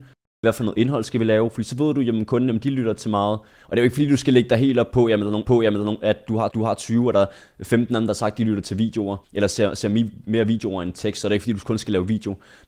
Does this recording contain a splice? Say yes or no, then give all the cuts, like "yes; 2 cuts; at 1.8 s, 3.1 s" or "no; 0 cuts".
yes; 3 cuts; at 5.4 s, 6.5 s, 9.2 s